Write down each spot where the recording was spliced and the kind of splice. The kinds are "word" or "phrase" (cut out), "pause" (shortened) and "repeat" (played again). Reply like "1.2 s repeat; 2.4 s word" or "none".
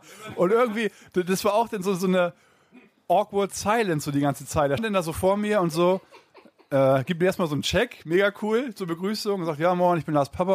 4.8 s word